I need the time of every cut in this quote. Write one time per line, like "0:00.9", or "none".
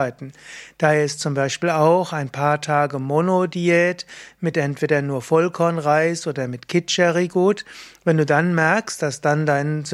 none